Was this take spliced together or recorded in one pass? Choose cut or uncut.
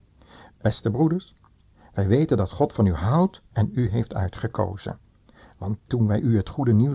uncut